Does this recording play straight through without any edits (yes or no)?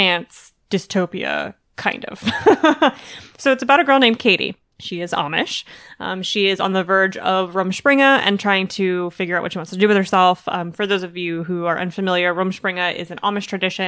yes